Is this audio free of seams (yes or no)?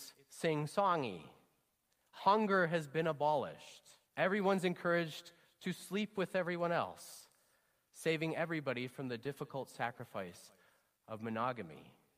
no